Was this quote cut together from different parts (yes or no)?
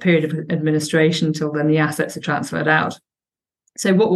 no